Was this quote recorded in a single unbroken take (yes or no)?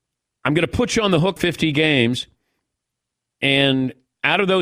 no